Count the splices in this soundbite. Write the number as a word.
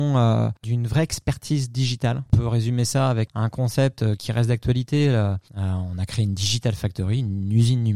one